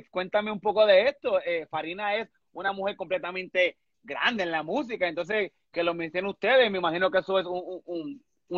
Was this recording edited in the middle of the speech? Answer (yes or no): no